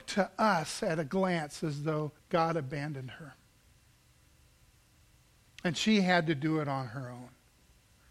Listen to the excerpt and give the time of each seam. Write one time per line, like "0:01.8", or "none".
0:02.2